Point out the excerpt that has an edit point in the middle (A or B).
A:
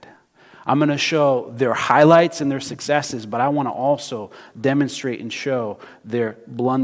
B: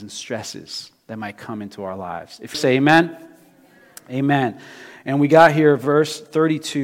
B